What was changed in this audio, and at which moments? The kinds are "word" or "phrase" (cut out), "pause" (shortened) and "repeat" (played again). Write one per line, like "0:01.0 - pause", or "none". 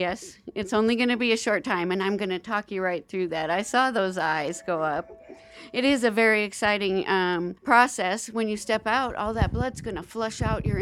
0:07.6 - pause